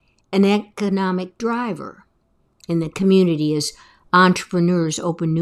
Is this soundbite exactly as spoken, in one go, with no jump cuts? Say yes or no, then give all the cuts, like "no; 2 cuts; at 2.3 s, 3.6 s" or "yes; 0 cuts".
yes; 0 cuts